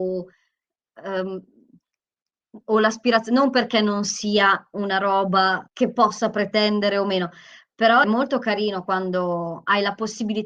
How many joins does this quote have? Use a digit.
2